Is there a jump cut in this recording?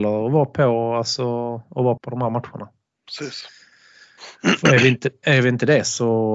yes; 1 cut; at 2.0 s

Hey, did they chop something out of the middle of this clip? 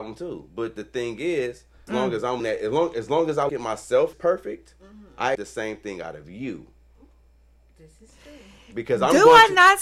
yes; 5 cuts; at 1.9 s, 2.4 s, 3.5 s, 4.1 s, 5.3 s

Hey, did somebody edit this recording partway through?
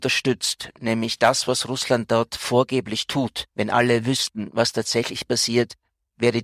yes; 1 cut; at 3.5 s

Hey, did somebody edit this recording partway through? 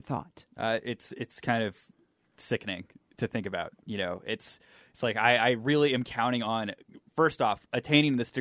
no; 0 cuts

